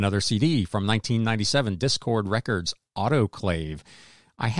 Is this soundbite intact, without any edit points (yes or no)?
yes